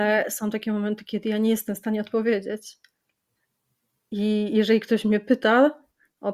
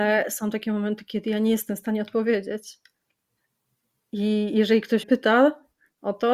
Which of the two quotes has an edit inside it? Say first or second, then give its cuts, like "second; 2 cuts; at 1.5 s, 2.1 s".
second; 1 cut; at 5.0 s